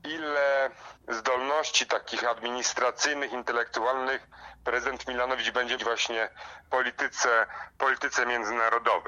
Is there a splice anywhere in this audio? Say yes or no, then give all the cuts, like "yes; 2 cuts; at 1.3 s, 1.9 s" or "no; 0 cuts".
yes; 3 cuts; at 1.0 s, 2.2 s, 5.8 s